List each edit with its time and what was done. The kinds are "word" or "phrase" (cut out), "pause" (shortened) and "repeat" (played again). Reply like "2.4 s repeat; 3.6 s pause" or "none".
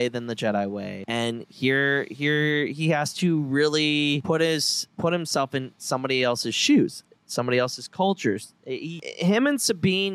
none